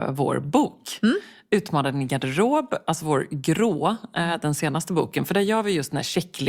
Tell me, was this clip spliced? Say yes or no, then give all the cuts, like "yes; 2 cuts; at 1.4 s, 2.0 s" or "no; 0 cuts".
no; 0 cuts